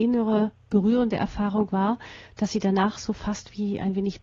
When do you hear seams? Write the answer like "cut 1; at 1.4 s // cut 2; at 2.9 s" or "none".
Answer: none